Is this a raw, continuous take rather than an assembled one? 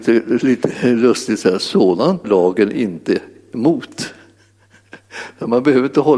no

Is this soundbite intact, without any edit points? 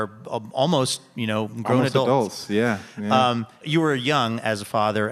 yes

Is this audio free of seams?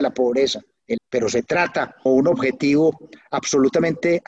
no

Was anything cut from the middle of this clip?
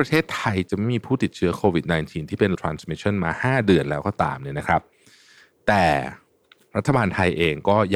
yes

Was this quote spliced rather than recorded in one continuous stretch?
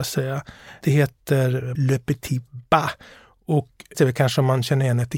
yes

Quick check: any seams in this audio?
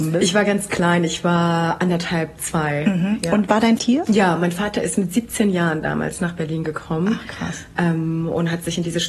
yes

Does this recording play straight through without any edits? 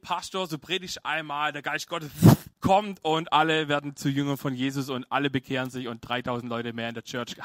no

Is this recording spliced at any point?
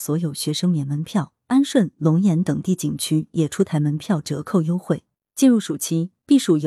no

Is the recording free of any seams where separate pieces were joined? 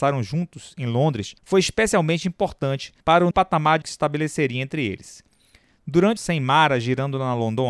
no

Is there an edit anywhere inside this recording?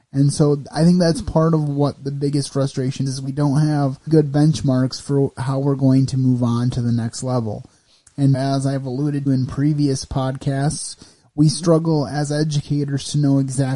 yes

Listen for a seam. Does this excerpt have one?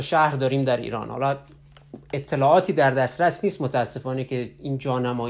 no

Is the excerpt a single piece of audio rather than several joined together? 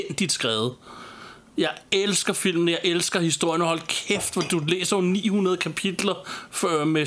yes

